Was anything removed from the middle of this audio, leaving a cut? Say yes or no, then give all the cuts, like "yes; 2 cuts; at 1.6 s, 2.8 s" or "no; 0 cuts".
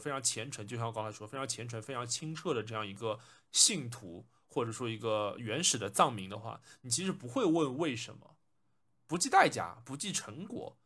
no; 0 cuts